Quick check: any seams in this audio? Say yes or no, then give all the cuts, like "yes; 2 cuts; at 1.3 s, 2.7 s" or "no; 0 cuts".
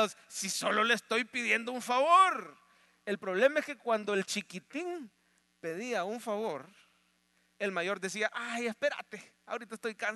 no; 0 cuts